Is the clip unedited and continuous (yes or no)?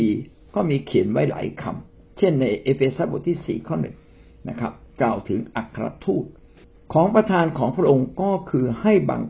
no